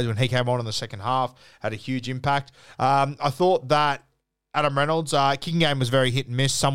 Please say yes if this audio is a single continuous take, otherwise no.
yes